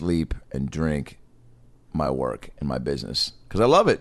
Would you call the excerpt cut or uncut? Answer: uncut